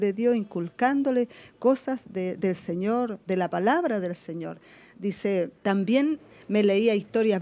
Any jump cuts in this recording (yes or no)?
yes